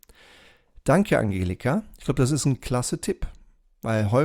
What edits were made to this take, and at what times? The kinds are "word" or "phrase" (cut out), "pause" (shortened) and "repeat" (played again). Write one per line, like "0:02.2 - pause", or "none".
none